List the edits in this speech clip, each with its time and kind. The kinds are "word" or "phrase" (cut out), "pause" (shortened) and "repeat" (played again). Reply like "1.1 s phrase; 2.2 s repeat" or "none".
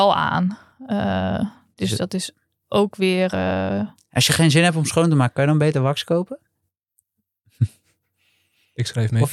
none